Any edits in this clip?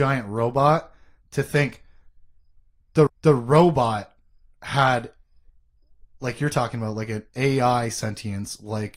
yes; 1 cut; at 3.1 s

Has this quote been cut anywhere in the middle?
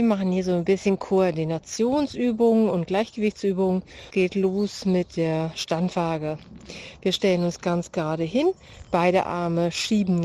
yes; 1 cut; at 4.1 s

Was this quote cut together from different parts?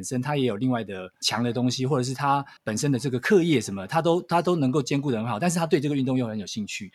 yes; 1 cut; at 2.6 s

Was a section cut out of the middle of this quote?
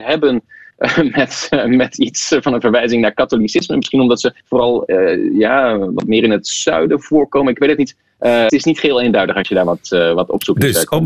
yes; 2 cuts; at 4.4 s, 8.5 s

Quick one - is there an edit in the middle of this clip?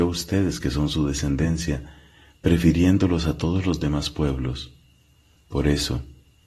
no; 0 cuts

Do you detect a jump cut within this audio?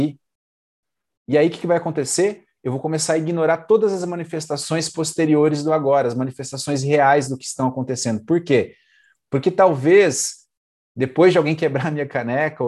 no; 0 cuts

